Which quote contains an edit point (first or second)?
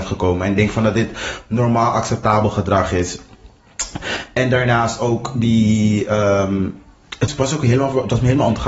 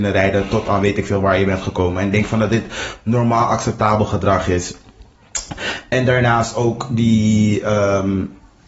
first